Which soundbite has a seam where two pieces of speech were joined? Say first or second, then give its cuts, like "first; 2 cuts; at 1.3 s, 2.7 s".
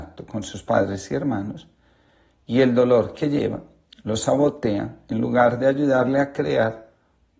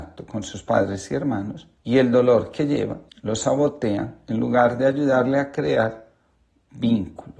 second; 2 cuts; at 1.8 s, 3.1 s